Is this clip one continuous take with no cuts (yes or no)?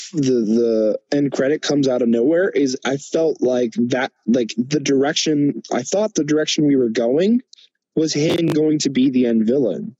yes